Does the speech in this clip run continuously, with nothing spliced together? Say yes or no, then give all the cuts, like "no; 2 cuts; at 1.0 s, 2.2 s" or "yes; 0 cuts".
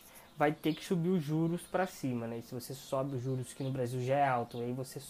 yes; 0 cuts